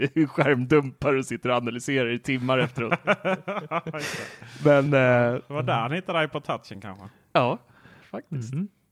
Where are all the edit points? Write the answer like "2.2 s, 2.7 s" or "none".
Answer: none